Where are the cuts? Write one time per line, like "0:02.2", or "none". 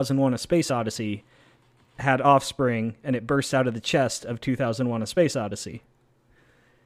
none